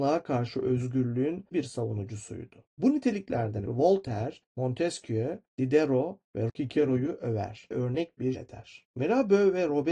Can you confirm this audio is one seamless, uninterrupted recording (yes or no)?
no